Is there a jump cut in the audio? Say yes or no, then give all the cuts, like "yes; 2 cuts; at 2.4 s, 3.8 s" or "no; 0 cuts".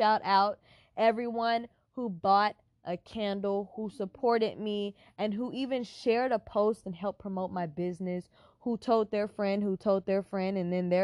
no; 0 cuts